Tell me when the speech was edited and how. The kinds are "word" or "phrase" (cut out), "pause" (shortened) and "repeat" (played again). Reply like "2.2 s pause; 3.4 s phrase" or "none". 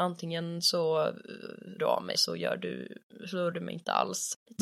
1.8 s word; 2.1 s word; 3.5 s word